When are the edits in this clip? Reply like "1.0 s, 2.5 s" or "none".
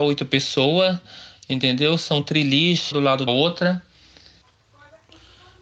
2.9 s, 3.3 s

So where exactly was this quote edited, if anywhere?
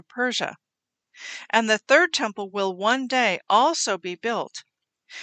none

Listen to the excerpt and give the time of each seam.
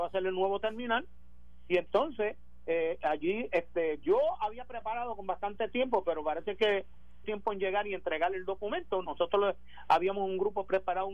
7.2 s

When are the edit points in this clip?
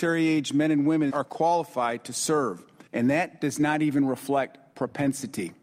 1.1 s, 2.9 s

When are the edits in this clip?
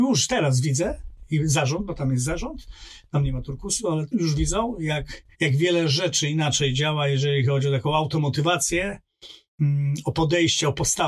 4.1 s, 5.3 s

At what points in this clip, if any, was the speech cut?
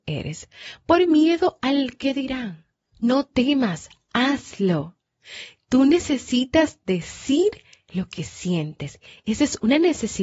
none

